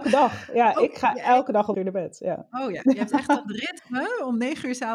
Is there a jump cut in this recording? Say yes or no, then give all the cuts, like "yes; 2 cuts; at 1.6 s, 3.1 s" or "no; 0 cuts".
yes; 1 cut; at 1.7 s